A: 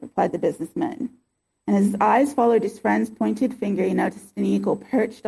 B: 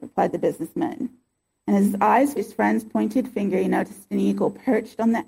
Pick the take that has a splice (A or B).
B